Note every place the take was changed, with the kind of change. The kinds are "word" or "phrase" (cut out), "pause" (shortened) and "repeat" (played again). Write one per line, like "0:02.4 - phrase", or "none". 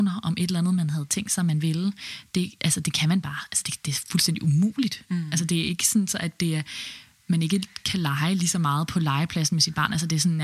none